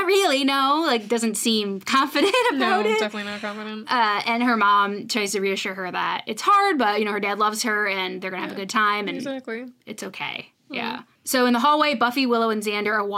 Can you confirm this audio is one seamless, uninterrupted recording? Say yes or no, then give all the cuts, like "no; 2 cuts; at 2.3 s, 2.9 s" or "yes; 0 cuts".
no; 1 cut; at 11.2 s